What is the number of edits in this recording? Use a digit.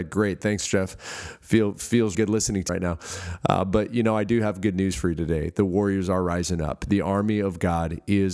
2